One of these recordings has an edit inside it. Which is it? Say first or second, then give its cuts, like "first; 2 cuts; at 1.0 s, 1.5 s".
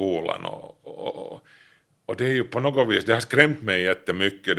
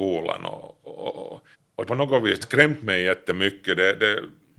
second; 3 cuts; at 1.5 s, 1.9 s, 2.4 s